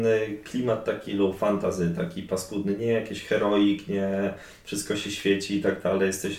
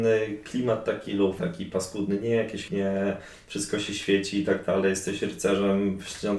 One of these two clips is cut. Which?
second; 2 cuts; at 1.4 s, 2.7 s

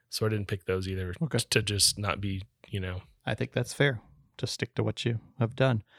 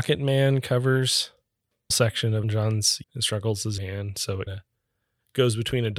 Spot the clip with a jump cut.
second; 5 cuts; at 1.9 s, 2.4 s, 3.0 s, 3.8 s, 4.5 s

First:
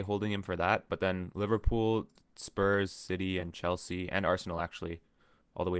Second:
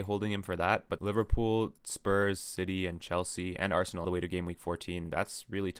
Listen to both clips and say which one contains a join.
second; 3 cuts; at 1.0 s, 1.8 s, 4.0 s

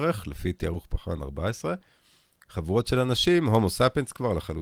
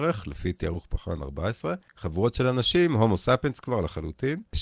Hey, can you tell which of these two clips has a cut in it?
second; 1 cut; at 1.9 s

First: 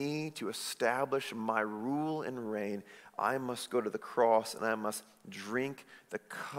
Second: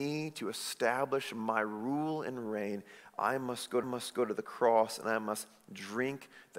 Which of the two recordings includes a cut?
second; 1 cut; at 3.8 s

